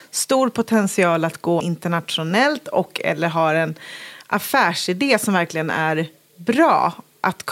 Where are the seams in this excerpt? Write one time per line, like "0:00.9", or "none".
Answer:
0:01.6